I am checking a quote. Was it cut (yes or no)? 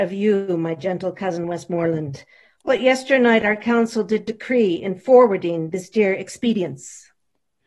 no